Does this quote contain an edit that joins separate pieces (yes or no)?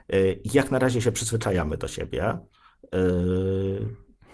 no